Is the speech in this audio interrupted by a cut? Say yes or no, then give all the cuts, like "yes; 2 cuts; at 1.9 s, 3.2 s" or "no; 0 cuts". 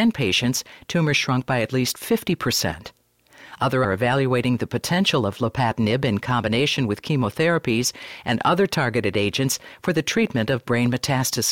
yes; 1 cut; at 3.8 s